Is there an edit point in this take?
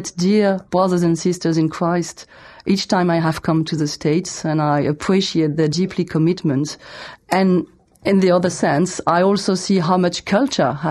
no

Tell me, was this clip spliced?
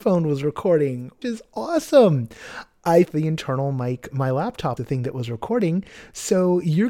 yes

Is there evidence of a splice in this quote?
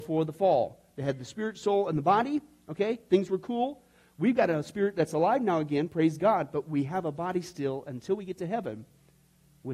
no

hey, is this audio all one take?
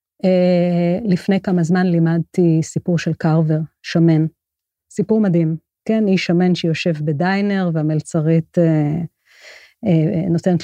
yes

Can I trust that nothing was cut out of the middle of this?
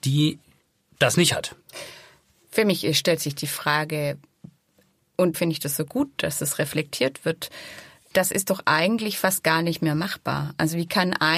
no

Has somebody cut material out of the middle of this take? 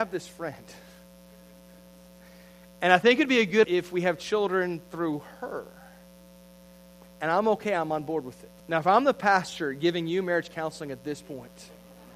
yes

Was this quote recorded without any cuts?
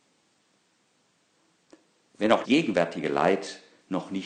no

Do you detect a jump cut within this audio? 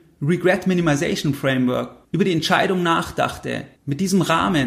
yes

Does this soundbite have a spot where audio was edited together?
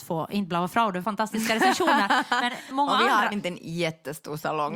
yes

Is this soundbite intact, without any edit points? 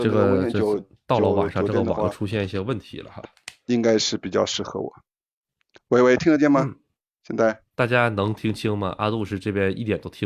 yes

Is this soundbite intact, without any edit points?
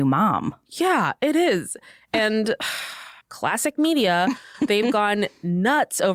no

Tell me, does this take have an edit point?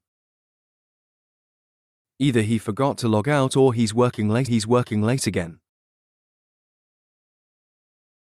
yes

